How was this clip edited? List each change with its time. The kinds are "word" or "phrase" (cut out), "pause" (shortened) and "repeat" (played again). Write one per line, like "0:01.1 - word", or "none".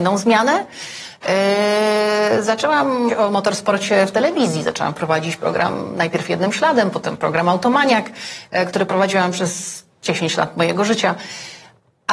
0:03.1 - word